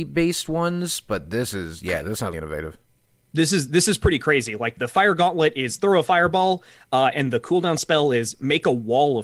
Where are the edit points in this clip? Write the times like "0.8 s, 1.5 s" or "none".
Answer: 2.3 s, 4.8 s

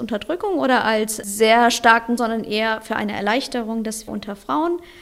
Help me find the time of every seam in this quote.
2.2 s, 4.1 s

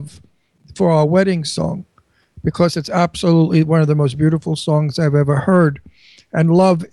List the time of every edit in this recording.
none

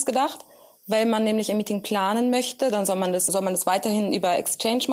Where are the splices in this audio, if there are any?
3.3 s

